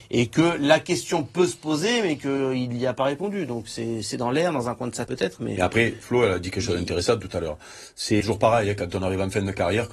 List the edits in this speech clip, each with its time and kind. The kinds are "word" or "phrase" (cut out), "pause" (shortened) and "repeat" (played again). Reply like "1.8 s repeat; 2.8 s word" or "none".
4.1 s word; 5.1 s word; 8.2 s word